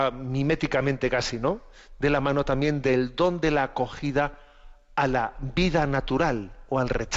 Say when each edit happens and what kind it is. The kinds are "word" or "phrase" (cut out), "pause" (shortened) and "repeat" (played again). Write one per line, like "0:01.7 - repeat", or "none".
none